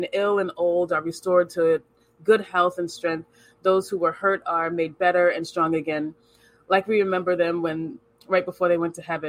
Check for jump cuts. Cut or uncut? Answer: uncut